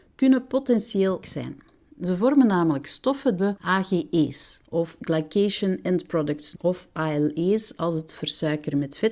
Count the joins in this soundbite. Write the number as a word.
four